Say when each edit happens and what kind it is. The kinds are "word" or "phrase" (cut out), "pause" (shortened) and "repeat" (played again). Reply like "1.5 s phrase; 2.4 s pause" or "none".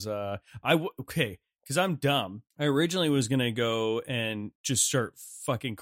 2.5 s pause; 4.6 s pause